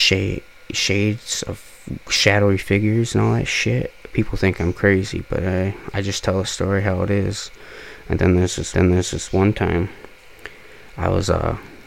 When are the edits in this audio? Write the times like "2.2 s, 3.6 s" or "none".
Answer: 8.7 s